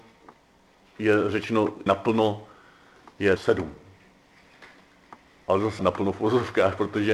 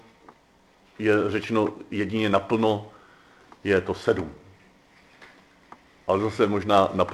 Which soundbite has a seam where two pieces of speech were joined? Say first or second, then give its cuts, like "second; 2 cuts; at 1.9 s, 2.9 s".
first; 3 cuts; at 1.9 s, 3.4 s, 5.8 s